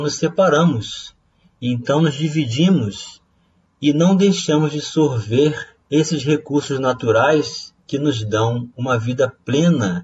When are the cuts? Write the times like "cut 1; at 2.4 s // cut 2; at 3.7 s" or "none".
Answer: cut 1; at 5.8 s // cut 2; at 7.8 s